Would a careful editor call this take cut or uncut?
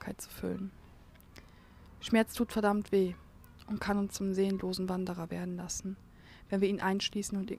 uncut